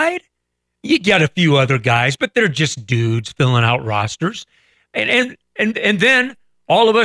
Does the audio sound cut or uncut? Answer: uncut